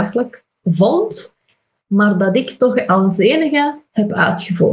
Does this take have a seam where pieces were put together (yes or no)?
no